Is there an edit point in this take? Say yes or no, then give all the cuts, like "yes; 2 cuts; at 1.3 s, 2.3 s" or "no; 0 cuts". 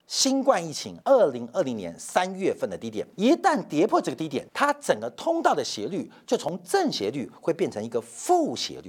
yes; 3 cuts; at 1.0 s, 3.1 s, 4.5 s